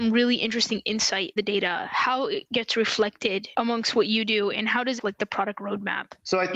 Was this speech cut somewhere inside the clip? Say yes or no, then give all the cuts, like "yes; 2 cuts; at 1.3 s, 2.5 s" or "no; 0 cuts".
yes; 2 cuts; at 1.4 s, 5.0 s